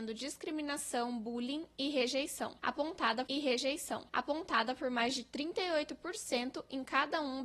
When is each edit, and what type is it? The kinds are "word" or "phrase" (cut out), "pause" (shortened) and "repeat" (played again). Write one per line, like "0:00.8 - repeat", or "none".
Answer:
0:03.3 - repeat

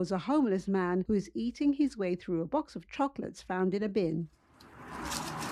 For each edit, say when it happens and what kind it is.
none

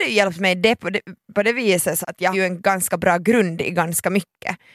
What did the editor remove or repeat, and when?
0:02.0 - word
0:02.3 - word

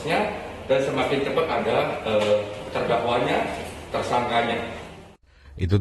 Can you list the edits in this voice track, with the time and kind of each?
none

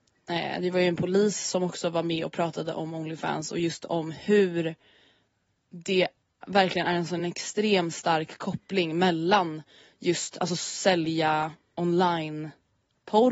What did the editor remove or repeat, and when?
none

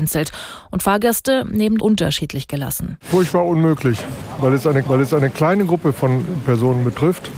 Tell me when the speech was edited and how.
0:01.8 - word
0:04.8 - repeat

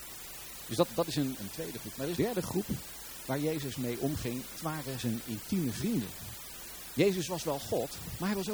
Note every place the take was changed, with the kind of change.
0:01.4 - word
0:02.2 - word
0:04.6 - word

